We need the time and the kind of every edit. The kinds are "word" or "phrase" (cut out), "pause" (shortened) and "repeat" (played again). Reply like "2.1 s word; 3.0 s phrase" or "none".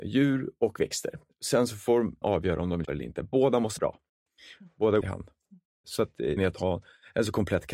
2.2 s word; 2.8 s word; 3.8 s word; 5.0 s phrase; 6.4 s word